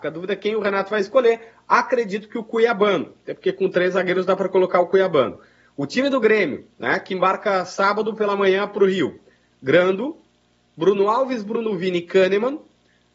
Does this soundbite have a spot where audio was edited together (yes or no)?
no